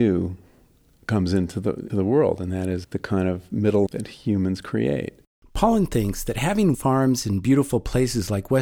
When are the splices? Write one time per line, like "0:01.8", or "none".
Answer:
0:01.9
0:02.8
0:03.9
0:06.7